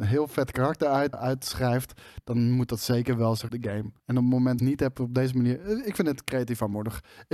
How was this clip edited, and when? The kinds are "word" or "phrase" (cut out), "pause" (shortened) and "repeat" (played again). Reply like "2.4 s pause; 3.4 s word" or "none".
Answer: 1.1 s word; 3.5 s phrase; 4.0 s pause; 4.6 s phrase

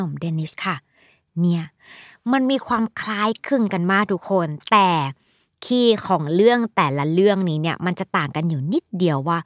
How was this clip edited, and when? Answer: none

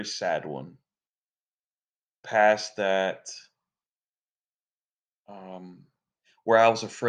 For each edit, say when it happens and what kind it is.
2.2 s word

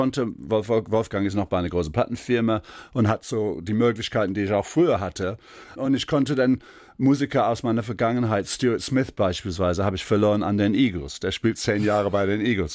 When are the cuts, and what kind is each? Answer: none

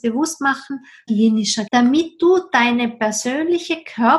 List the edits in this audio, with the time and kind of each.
1.1 s phrase; 1.7 s word

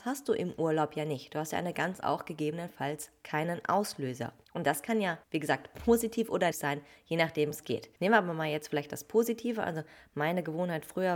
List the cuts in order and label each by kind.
2.0 s phrase; 4.4 s pause; 5.2 s pause; 6.5 s word; 7.5 s word; 8.0 s pause

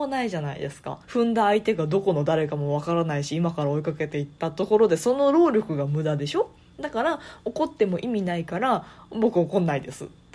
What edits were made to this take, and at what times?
1.0 s pause

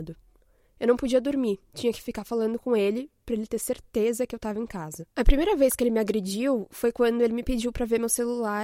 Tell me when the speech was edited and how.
1.6 s pause; 5.1 s pause

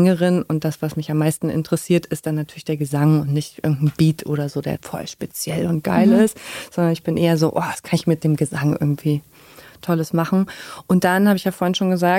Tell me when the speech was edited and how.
4.8 s word

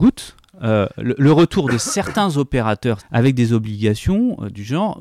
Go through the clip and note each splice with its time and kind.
3.0 s word

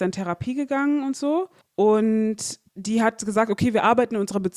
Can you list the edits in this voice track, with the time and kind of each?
2.7 s pause

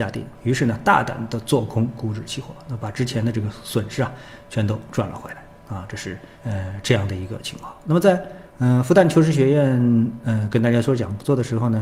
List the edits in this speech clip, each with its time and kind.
6.3 s pause; 8.5 s pause

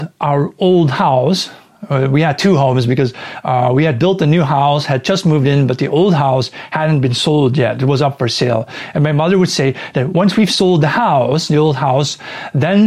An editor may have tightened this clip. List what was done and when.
10.1 s word

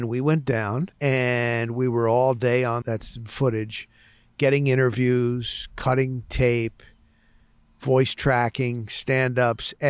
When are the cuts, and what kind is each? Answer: 0.9 s pause; 2.8 s phrase

